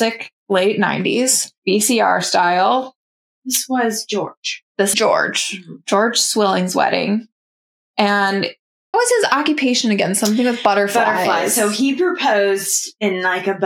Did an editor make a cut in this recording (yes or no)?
yes